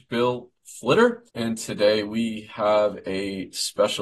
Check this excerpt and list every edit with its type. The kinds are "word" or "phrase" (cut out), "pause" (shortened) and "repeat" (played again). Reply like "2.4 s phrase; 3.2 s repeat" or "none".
1.3 s pause

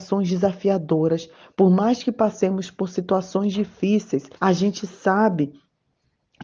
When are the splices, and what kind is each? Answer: 4.4 s pause

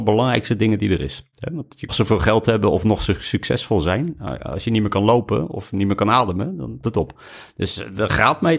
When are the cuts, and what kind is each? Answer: 1.9 s phrase; 6.8 s word

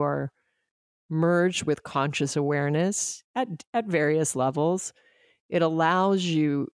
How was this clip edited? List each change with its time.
none

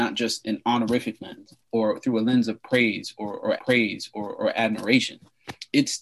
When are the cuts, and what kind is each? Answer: 1.6 s pause; 3.6 s repeat

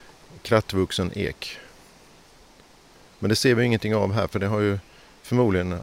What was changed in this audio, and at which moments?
none

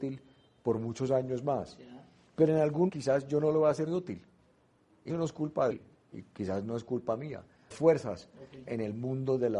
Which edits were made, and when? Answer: 2.9 s word; 3.9 s word; 5.1 s word; 5.7 s word; 7.7 s word

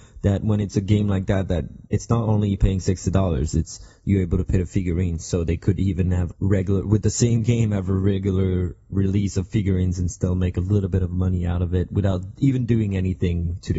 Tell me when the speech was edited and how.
1.9 s pause; 6.3 s phrase

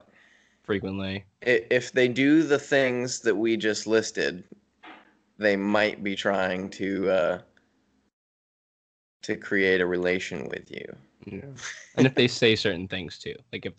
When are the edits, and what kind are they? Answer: none

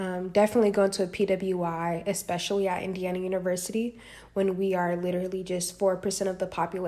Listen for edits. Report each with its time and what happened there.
none

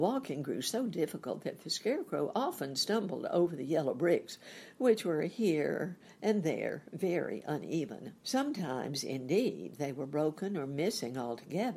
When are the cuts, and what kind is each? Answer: 8.2 s pause

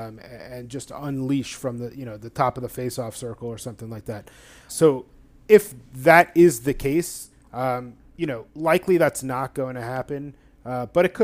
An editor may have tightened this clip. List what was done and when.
4.7 s word; 8.5 s pause

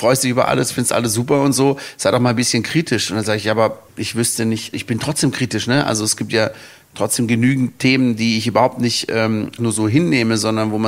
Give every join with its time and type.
3.9 s pause; 4.7 s word; 9.6 s word

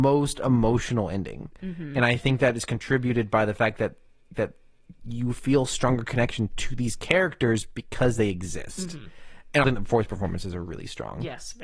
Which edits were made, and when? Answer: 4.4 s repeat; 9.6 s word

